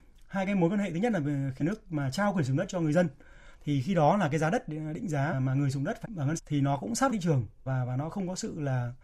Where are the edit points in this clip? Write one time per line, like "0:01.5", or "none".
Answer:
0:01.6
0:05.3
0:06.0
0:06.4
0:07.1
0:07.7